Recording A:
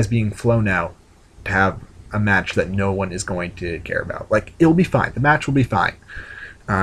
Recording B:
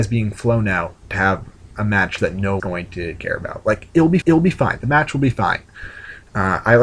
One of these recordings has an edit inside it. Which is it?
B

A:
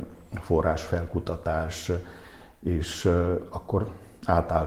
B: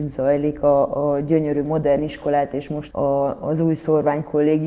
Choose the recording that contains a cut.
B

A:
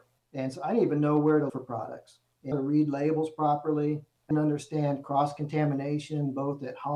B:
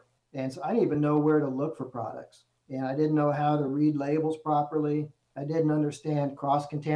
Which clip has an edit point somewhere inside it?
A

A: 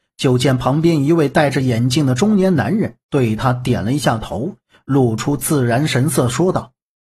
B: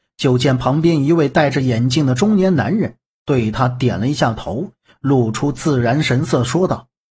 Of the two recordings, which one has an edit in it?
A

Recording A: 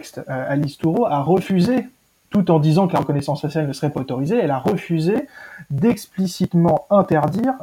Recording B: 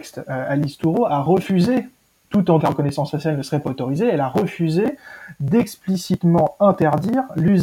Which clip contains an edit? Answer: B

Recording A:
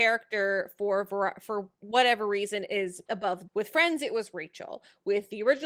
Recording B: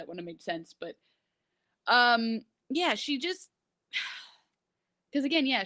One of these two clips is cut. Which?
A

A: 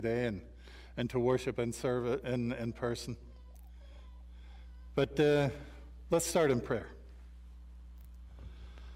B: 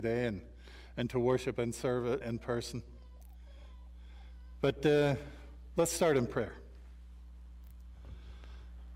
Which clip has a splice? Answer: B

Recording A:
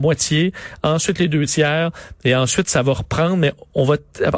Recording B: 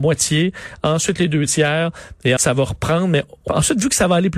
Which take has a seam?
B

